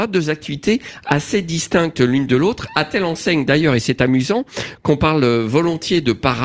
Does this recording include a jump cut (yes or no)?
no